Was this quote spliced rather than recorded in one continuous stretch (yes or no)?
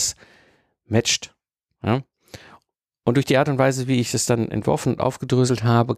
no